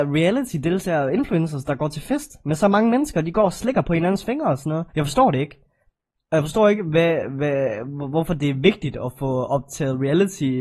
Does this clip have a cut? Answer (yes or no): yes